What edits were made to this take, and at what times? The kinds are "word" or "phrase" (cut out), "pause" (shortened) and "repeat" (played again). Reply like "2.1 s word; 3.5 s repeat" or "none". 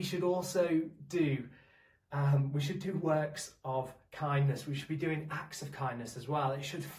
none